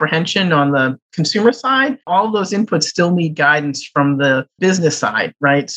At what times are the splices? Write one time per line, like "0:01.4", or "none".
0:02.0